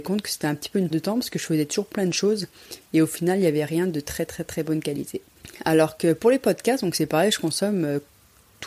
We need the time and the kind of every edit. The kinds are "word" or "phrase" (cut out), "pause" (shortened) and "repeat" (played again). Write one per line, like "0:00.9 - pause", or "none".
0:00.9 - word
0:04.3 - word